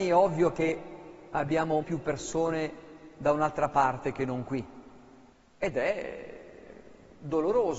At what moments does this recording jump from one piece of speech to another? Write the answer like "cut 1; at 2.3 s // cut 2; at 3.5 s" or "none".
cut 1; at 1.8 s // cut 2; at 5.3 s